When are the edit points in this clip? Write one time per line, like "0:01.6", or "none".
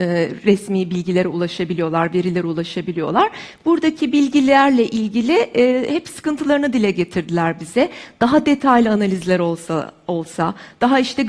none